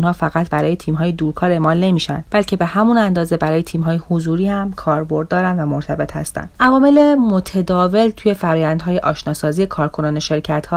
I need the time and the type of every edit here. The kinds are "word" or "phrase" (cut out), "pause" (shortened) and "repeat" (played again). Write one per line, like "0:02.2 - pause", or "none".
none